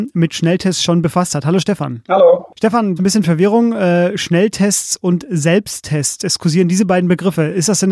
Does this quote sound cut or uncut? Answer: cut